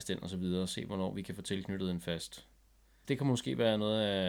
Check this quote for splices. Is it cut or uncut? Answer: cut